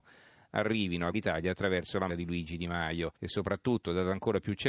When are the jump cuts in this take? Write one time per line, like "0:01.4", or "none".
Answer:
0:01.1
0:02.1
0:03.1

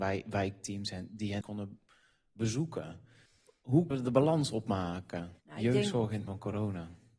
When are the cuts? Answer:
0:01.4
0:03.9
0:05.4
0:06.3

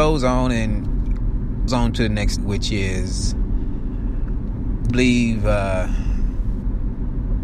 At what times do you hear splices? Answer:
0:01.7
0:02.4
0:04.9

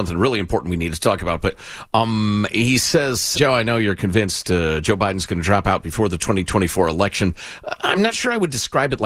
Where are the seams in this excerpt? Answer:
0:03.3

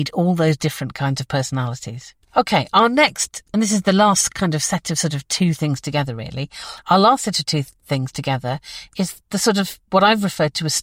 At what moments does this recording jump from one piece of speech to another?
0:02.2

